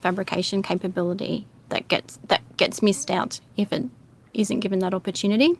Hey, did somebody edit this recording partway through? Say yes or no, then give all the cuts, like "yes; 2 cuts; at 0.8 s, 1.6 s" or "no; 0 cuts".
yes; 1 cut; at 1.7 s